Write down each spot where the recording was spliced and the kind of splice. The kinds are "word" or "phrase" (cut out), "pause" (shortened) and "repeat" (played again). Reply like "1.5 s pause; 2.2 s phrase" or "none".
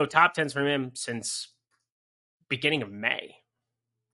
none